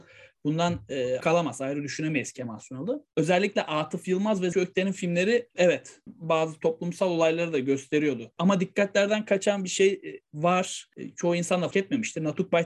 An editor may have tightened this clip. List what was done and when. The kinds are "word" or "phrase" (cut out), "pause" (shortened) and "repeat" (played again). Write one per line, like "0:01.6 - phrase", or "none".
0:01.2 - word
0:04.5 - word
0:06.1 - word
0:11.7 - word